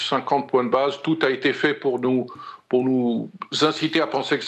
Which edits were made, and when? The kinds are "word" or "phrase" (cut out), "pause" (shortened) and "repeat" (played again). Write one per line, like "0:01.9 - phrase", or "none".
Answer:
none